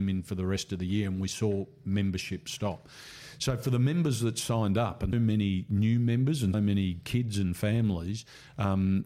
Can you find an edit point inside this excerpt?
yes; 2 cuts; at 5.1 s, 6.5 s

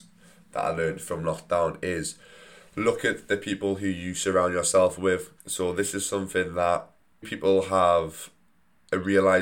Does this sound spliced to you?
yes; 2 cuts; at 5.4 s, 7.2 s

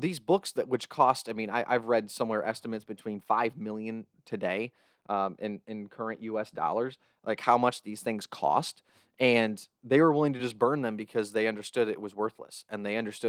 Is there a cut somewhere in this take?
no; 0 cuts

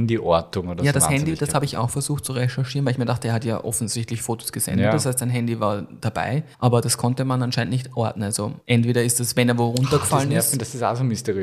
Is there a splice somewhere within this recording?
yes; 2 cuts; at 6.5 s, 8.6 s

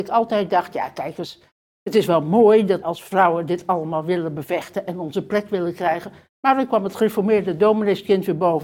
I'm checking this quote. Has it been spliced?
yes; 1 cut; at 2.8 s

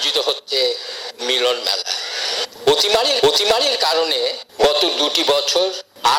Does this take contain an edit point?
yes; 2 cuts; at 1.2 s, 3.2 s

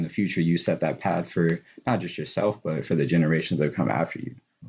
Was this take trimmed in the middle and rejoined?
no; 0 cuts

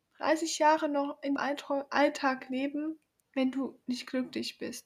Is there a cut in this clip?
yes; 2 cuts; at 1.4 s, 3.2 s

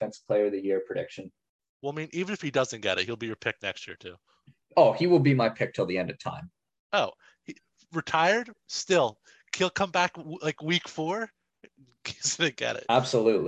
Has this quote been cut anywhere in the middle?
no; 0 cuts

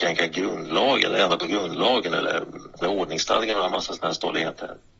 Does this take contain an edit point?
yes; 1 cut; at 2.8 s

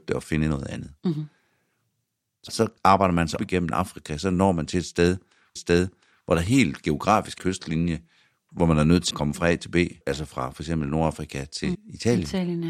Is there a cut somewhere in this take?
yes; 8 cuts; at 2.5 s, 2.8 s, 3.4 s, 5.6 s, 7.4 s, 9.1 s, 10.0 s, 11.7 s

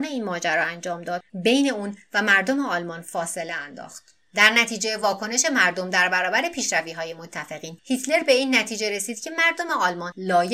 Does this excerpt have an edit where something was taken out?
no; 0 cuts

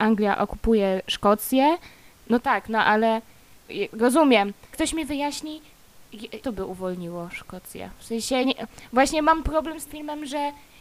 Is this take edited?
yes; 6 cuts; at 2.4 s, 4.7 s, 6.4 s, 8.4 s, 9.4 s, 9.9 s

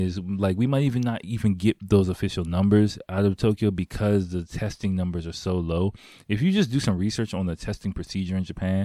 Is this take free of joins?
yes; 0 cuts

